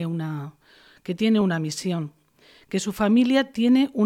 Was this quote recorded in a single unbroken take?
yes; 0 cuts

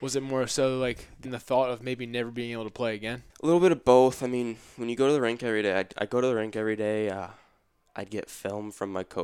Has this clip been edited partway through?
yes; 2 cuts; at 1.3 s, 3.3 s

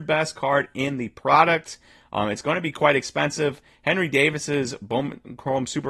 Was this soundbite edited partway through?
no; 0 cuts

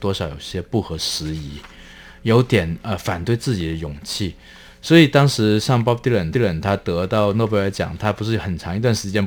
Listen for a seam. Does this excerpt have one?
yes; 1 cut; at 6.3 s

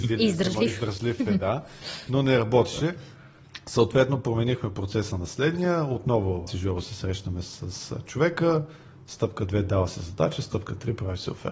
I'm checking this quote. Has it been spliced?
yes; 1 cut; at 6.5 s

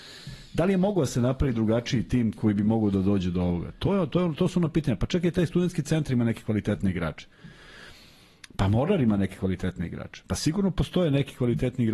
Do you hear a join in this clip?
no; 0 cuts

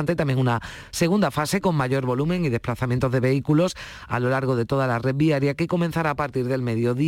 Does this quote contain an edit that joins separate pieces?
no; 0 cuts

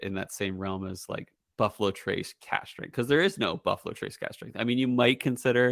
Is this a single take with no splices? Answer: yes; 0 cuts

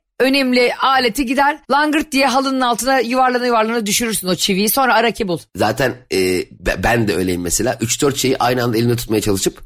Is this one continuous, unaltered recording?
no; 3 cuts; at 1.6 s, 5.5 s, 6.6 s

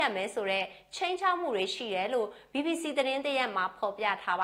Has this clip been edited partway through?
no; 0 cuts

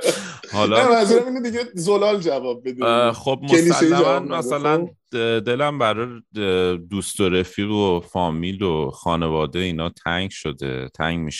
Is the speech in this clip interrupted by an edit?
no; 0 cuts

